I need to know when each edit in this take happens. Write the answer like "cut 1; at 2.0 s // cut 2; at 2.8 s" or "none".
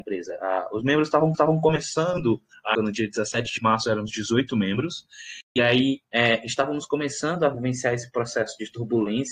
cut 1; at 1.3 s // cut 2; at 2.7 s // cut 3; at 5.5 s // cut 4; at 6.0 s